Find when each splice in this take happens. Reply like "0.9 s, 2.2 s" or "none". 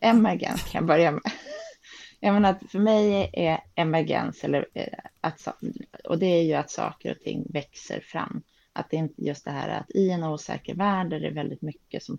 none